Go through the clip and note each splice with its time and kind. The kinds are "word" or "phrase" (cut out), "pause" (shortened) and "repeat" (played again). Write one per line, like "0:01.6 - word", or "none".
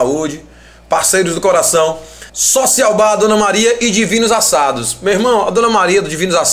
0:02.3 - pause